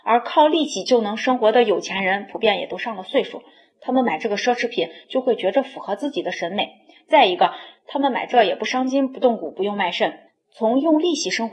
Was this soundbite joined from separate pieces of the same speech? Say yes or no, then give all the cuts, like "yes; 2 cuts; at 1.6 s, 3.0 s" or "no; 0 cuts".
yes; 1 cut; at 10.3 s